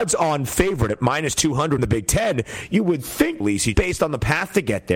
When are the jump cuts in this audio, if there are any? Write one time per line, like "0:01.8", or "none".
0:01.8
0:03.4
0:03.7